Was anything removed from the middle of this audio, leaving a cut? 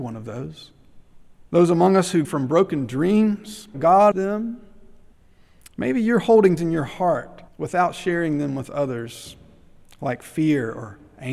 yes; 7 cuts; at 1.5 s, 2.2 s, 3.7 s, 4.1 s, 5.1 s, 6.6 s, 7.5 s

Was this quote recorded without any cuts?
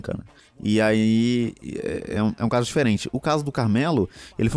yes; 0 cuts

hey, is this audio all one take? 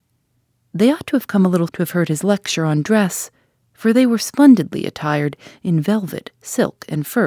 no; 1 cut; at 1.7 s

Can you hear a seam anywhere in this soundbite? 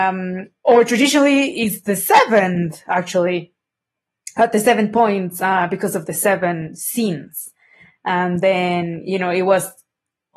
no; 0 cuts

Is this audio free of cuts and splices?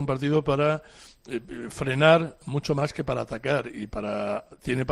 yes; 0 cuts

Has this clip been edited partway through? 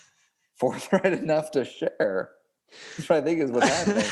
no; 0 cuts

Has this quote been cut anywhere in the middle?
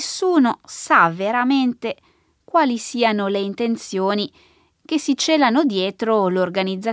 no; 0 cuts

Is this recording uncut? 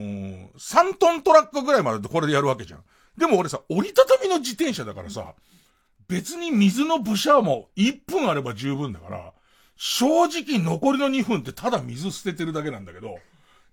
yes; 0 cuts

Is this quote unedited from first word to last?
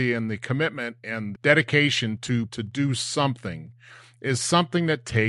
no; 2 cuts; at 1.3 s, 2.5 s

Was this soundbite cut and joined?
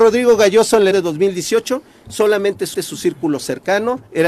yes; 2 cuts; at 0.9 s, 2.7 s

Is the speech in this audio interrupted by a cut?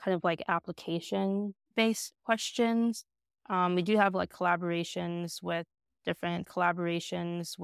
yes; 2 cuts; at 2.1 s, 6.4 s

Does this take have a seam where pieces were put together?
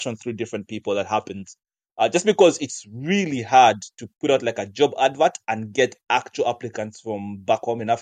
no; 0 cuts

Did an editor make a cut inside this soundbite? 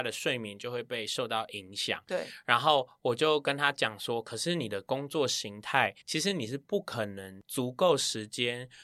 yes; 1 cut; at 6.0 s

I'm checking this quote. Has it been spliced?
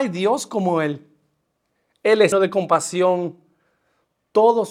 yes; 1 cut; at 2.3 s

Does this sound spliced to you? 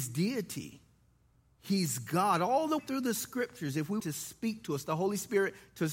yes; 2 cuts; at 2.8 s, 4.0 s

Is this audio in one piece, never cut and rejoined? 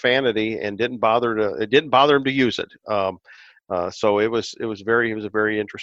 yes; 0 cuts

